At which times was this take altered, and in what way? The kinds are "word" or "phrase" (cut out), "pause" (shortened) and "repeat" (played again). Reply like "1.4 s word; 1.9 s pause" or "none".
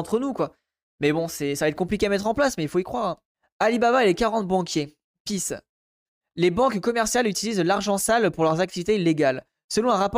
3.3 s pause